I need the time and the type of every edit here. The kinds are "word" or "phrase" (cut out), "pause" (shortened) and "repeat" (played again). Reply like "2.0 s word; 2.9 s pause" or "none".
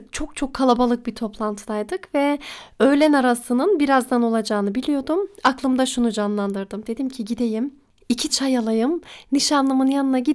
8.3 s word